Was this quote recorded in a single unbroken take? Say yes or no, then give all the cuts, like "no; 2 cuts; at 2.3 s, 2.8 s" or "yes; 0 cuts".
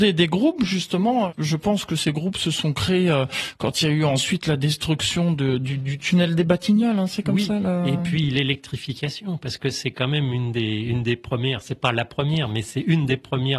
yes; 0 cuts